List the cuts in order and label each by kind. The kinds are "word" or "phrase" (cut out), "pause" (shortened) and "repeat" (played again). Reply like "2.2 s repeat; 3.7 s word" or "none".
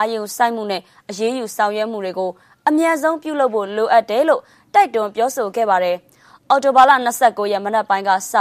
none